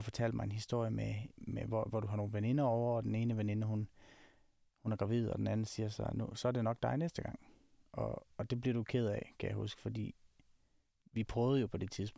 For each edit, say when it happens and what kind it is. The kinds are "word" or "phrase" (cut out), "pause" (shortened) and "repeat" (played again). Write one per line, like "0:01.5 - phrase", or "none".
none